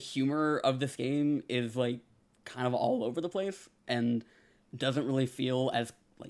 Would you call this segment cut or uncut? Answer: uncut